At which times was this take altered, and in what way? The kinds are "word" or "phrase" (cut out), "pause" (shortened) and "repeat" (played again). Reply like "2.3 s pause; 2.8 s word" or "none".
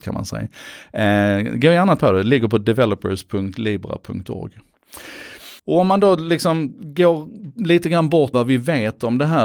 2.0 s word; 5.6 s pause; 8.3 s word